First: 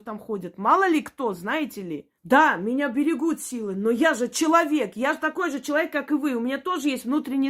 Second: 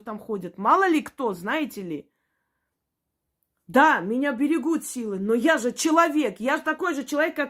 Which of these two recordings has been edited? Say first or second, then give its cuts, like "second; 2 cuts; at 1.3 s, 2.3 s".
first; 1 cut; at 2.2 s